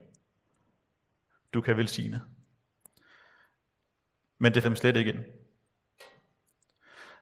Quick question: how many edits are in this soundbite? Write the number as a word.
one